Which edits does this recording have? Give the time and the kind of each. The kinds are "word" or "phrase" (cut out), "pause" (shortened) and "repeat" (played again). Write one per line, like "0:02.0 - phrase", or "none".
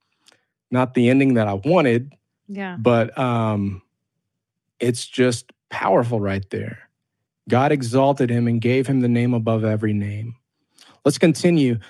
none